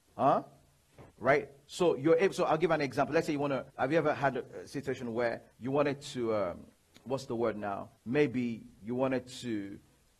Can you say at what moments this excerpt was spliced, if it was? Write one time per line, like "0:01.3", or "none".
0:01.1
0:03.7
0:05.5
0:06.7
0:08.0